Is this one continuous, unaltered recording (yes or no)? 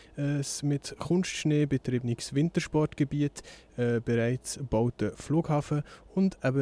yes